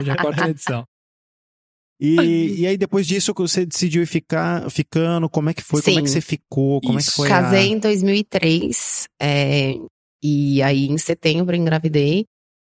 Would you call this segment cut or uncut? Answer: uncut